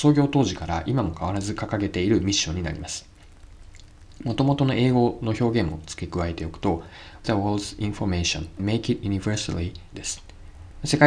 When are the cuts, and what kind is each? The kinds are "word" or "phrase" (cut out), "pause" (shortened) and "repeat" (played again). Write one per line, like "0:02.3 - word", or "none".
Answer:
0:07.2 - word
0:08.6 - word
0:09.9 - phrase